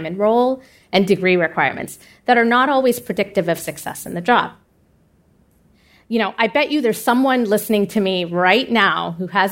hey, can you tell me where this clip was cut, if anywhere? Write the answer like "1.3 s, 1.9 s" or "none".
none